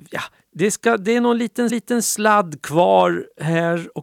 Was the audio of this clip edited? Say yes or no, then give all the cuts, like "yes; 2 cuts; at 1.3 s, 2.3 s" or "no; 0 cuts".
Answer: yes; 1 cut; at 1.7 s